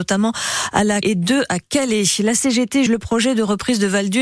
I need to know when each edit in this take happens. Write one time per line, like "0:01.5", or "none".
0:01.0
0:02.9